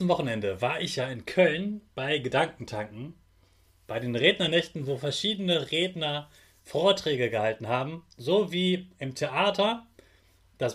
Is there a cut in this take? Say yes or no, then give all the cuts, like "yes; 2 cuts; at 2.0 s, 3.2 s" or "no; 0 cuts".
no; 0 cuts